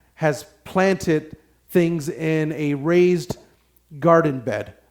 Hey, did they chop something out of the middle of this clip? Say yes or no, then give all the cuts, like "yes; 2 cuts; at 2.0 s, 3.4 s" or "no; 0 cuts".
no; 0 cuts